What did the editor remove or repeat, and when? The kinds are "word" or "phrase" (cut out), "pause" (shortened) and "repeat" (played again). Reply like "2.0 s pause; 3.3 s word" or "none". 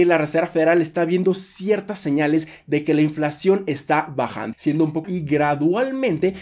4.5 s word; 5.0 s phrase